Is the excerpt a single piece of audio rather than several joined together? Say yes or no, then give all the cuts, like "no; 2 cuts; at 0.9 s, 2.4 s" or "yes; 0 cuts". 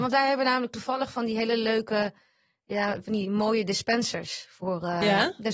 yes; 0 cuts